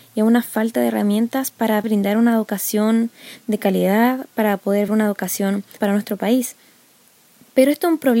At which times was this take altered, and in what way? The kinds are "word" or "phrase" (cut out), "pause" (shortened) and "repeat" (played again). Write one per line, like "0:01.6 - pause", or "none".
0:01.8 - word
0:04.9 - word
0:05.8 - word